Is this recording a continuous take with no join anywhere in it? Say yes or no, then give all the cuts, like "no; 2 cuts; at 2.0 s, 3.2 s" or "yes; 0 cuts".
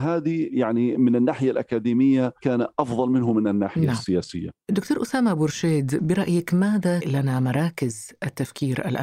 no; 2 cuts; at 2.4 s, 7.0 s